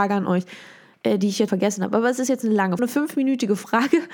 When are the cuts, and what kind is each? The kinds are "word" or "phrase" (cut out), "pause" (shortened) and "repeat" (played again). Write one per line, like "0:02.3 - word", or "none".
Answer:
0:01.5 - word
0:02.8 - phrase